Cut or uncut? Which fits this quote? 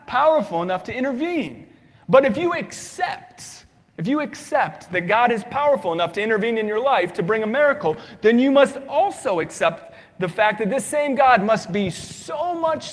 uncut